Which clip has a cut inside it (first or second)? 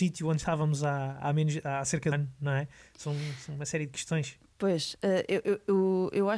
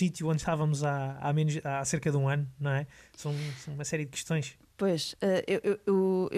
first